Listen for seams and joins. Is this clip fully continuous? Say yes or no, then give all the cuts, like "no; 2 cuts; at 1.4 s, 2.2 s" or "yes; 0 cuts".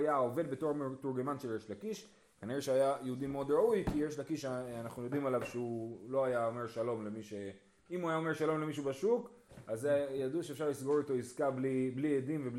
yes; 0 cuts